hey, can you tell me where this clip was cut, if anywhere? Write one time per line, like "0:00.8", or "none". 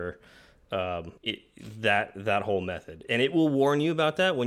0:01.2